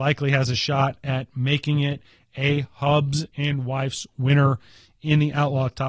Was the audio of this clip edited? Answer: no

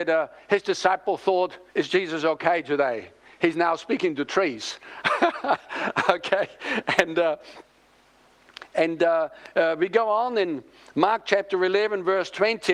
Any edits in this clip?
yes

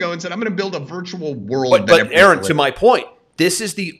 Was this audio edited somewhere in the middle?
no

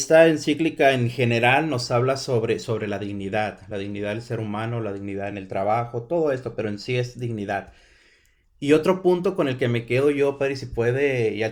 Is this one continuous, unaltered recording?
yes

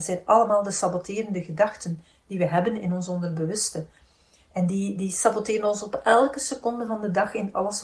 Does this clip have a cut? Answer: no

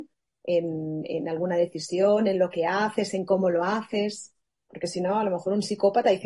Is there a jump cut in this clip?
no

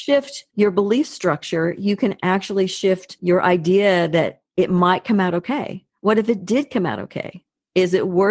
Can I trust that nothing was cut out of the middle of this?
yes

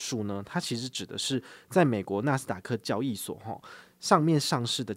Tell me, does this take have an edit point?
no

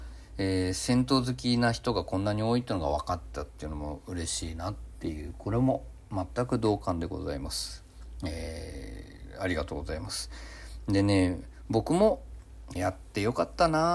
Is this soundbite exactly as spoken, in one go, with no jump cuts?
no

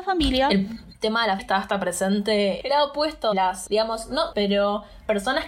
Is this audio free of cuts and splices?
no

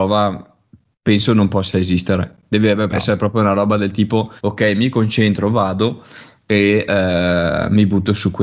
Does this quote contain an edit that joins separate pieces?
yes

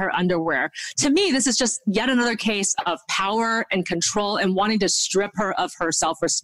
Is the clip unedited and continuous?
yes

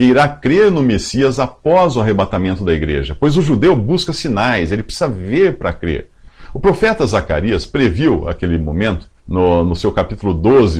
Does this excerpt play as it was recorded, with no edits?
no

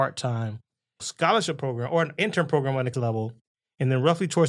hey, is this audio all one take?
no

